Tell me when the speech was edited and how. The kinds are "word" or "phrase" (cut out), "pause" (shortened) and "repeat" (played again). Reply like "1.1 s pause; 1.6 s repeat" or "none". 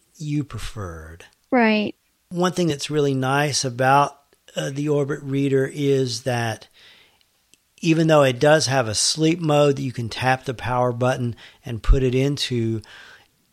none